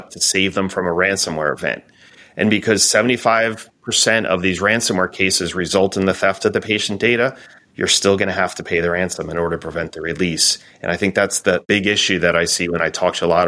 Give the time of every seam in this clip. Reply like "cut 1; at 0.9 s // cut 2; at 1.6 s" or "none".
none